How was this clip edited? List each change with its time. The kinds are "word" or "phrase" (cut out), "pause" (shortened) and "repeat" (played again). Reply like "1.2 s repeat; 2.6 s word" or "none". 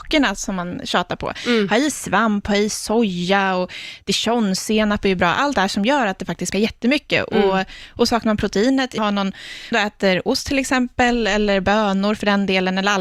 5.5 s word; 6.5 s word; 9.0 s word; 9.7 s phrase